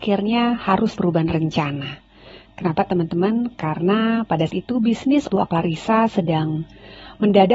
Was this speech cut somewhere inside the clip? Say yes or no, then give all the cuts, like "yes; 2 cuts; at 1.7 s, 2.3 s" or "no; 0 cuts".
yes; 3 cuts; at 1.0 s, 4.5 s, 5.3 s